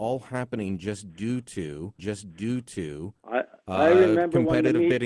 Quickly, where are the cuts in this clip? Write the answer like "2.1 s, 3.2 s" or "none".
2.0 s